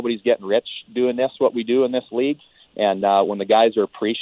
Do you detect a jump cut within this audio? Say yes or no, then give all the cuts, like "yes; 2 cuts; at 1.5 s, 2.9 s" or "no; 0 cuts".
no; 0 cuts